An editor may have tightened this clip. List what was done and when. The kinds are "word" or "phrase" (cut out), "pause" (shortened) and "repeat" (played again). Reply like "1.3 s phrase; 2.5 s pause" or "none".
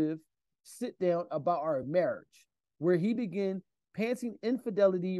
none